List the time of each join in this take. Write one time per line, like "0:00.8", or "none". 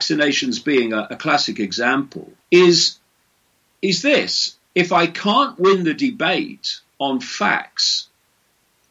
0:02.4
0:04.6
0:06.9